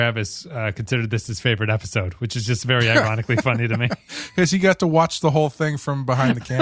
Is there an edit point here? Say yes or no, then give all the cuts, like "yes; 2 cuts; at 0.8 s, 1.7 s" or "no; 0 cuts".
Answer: no; 0 cuts